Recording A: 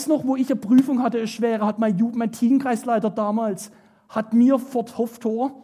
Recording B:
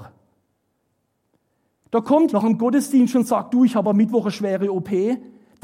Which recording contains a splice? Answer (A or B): B